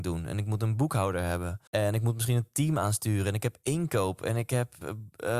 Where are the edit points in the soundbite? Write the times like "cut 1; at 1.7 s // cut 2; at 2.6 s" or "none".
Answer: cut 1; at 1.7 s